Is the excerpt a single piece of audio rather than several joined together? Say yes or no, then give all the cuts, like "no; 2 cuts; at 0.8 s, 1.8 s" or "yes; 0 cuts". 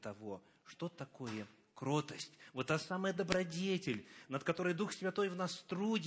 yes; 0 cuts